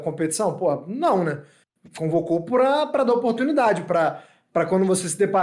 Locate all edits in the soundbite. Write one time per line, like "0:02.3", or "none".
none